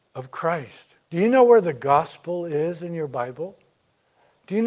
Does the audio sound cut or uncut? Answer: cut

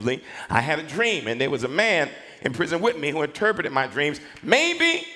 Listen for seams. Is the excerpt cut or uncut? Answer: uncut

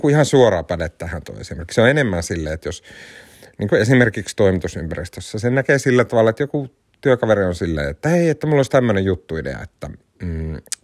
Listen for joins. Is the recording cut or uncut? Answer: uncut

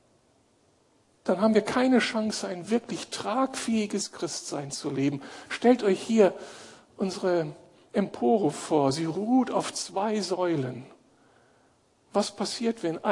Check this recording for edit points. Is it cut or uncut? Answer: uncut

